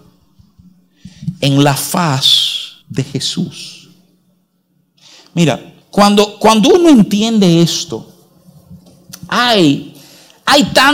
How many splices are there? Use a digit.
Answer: 2